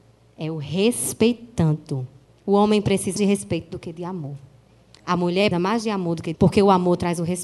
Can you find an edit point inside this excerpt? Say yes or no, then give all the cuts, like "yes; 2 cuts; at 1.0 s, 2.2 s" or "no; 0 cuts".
yes; 4 cuts; at 2.3 s, 3.2 s, 5.5 s, 6.3 s